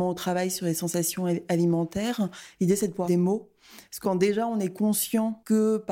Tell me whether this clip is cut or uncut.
cut